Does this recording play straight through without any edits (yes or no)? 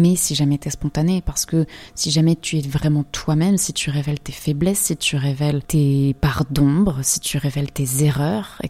yes